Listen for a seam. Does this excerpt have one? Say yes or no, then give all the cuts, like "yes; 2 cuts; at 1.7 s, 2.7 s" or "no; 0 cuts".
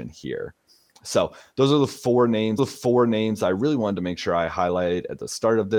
yes; 1 cut; at 2.6 s